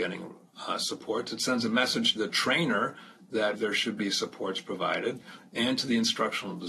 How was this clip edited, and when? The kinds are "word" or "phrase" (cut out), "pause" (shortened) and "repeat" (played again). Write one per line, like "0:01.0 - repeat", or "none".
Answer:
0:02.2 - word
0:03.5 - word